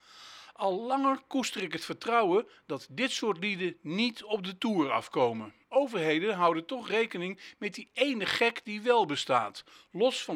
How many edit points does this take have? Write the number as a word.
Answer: one